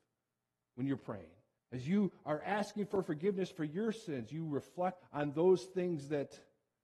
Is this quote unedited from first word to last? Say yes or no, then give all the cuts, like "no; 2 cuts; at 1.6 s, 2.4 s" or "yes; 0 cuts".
no; 2 cuts; at 1.6 s, 5.0 s